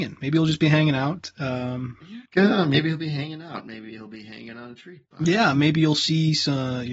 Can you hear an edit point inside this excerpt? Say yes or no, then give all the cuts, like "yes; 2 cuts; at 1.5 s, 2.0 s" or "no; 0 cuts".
yes; 2 cuts; at 2.2 s, 5.0 s